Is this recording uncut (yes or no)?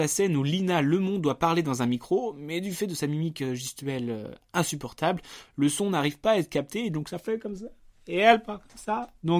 yes